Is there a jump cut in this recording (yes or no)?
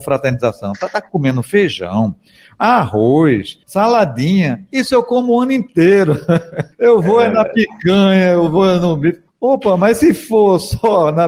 yes